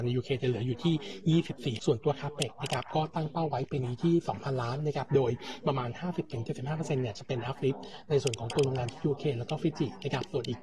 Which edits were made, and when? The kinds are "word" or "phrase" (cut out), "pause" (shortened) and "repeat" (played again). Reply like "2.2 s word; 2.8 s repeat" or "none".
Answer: 1.8 s phrase